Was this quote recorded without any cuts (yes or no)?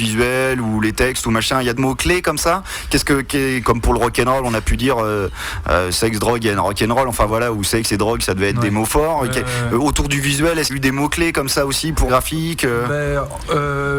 no